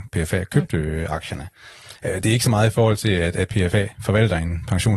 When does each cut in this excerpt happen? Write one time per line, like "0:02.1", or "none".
none